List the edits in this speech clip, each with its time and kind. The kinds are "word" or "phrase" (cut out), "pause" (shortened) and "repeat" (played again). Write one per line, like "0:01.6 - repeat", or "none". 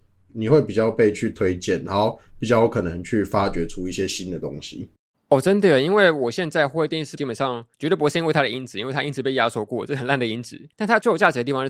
0:05.1 - pause
0:07.2 - word
0:07.7 - pause
0:10.7 - pause